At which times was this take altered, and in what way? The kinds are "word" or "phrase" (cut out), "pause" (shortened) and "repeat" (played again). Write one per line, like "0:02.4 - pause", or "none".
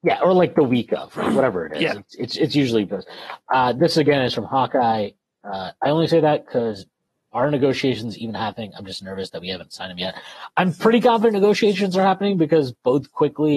0:02.9 - word
0:03.4 - pause